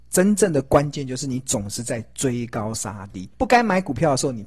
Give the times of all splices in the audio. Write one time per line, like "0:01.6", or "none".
0:03.3